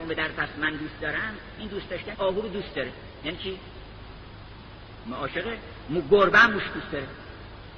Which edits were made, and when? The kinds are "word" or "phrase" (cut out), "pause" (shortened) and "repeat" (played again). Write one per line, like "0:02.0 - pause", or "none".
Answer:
0:02.1 - word